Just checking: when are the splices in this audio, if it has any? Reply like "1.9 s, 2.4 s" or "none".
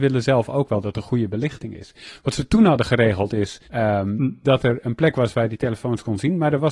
3.6 s